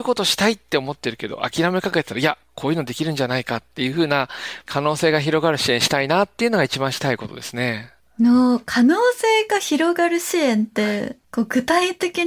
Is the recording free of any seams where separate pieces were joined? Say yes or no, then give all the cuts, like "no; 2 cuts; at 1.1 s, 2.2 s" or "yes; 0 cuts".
no; 1 cut; at 11.2 s